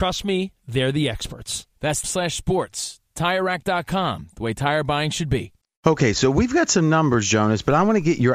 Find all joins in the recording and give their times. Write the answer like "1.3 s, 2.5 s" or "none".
2.0 s, 5.6 s